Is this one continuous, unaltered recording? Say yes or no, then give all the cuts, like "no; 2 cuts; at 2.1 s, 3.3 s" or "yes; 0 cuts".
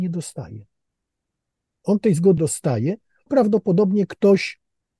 no; 2 cuts; at 2.4 s, 3.3 s